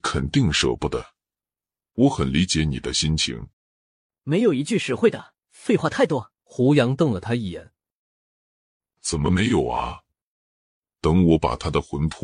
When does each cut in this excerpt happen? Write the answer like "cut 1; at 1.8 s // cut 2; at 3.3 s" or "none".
cut 1; at 3.5 s // cut 2; at 5.4 s // cut 3; at 6.4 s